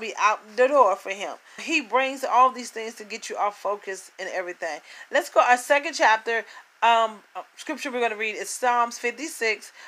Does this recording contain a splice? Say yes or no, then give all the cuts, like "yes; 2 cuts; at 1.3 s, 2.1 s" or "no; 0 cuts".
yes; 1 cut; at 1.6 s